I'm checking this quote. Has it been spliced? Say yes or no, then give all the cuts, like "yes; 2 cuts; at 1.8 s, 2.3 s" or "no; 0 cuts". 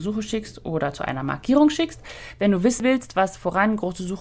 no; 0 cuts